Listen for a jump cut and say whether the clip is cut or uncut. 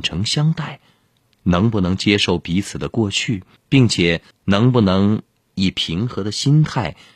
cut